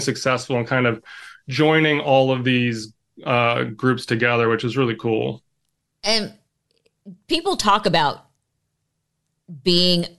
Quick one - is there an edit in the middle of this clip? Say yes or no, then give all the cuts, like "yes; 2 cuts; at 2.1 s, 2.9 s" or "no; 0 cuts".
no; 0 cuts